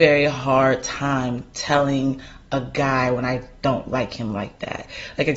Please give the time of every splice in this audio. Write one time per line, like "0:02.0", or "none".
none